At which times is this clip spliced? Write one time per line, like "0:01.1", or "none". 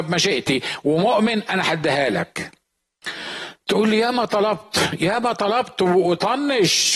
none